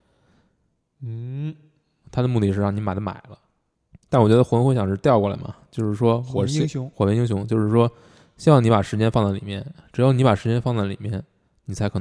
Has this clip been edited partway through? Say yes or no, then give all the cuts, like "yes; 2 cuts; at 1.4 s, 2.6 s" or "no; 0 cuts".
no; 0 cuts